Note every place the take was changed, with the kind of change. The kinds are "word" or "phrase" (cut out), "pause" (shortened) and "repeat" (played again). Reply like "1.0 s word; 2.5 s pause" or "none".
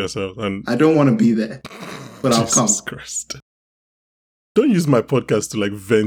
none